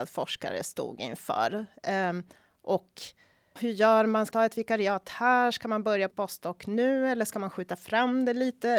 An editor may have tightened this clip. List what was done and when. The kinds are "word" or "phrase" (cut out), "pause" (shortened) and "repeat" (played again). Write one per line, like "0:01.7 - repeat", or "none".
0:03.6 - word
0:04.3 - word
0:06.1 - word